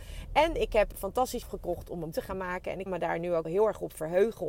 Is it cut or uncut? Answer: cut